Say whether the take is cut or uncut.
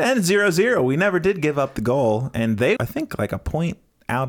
cut